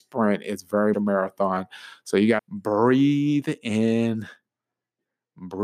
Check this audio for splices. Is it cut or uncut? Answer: cut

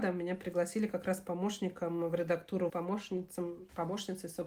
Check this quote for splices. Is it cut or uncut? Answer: cut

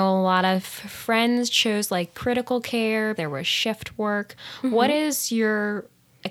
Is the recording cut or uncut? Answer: cut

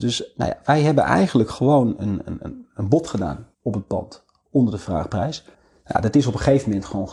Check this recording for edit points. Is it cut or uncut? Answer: cut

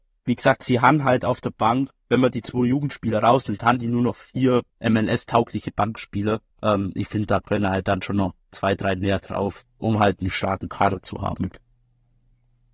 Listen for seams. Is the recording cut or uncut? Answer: cut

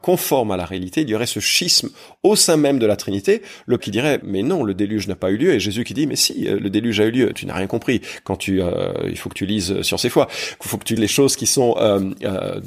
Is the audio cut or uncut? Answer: cut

